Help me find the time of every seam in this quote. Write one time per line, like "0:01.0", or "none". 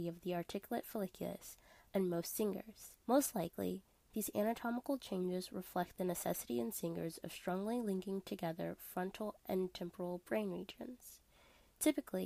0:03.0